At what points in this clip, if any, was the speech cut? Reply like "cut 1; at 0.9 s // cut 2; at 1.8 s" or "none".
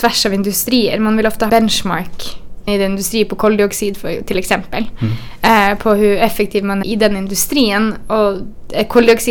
cut 1; at 1.5 s // cut 2; at 2.7 s // cut 3; at 6.8 s